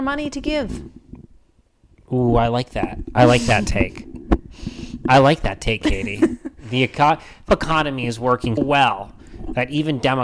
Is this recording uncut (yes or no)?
no